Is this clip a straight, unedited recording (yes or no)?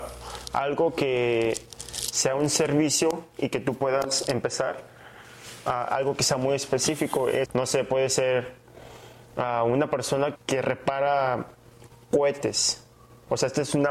no